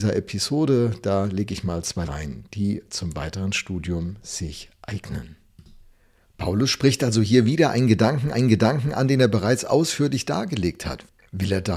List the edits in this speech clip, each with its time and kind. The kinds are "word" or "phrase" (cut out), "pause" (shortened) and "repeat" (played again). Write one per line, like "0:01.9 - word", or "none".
0:02.1 - phrase
0:08.3 - repeat